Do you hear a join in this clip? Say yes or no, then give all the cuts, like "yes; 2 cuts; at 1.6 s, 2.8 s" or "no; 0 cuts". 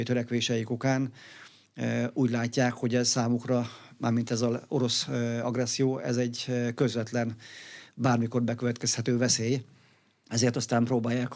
no; 0 cuts